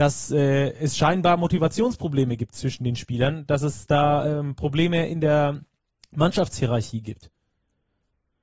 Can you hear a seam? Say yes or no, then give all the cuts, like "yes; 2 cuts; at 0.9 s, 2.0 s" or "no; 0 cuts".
no; 0 cuts